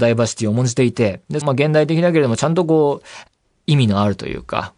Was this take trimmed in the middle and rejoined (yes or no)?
yes